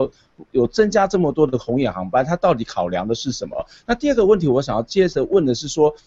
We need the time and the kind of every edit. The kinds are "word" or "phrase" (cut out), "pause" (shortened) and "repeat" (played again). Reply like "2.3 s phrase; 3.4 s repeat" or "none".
none